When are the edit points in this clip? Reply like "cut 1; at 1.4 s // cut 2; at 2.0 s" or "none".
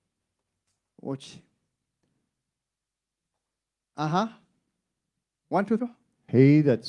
cut 1; at 5.8 s